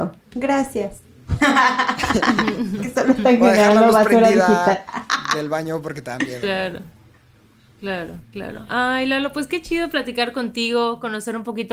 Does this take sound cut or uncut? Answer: uncut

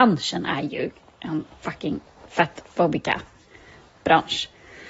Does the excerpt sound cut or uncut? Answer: uncut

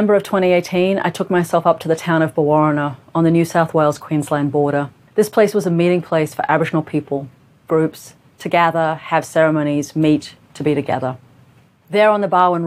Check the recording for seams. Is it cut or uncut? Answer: cut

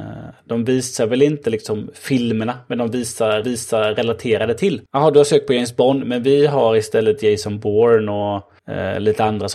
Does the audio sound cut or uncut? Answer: cut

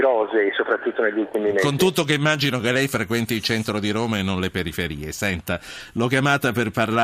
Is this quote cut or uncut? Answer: uncut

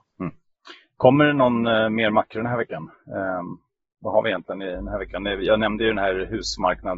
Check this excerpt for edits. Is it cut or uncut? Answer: uncut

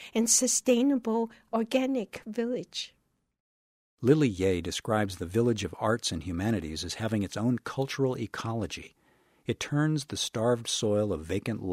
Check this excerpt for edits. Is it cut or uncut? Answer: uncut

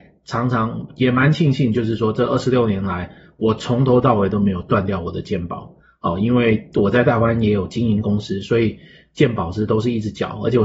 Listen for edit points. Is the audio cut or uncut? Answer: uncut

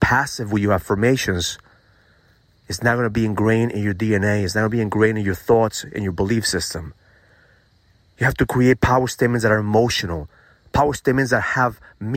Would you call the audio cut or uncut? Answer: uncut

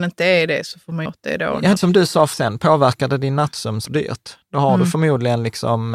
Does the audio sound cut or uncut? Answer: cut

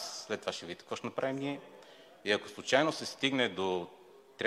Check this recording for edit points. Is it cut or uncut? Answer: uncut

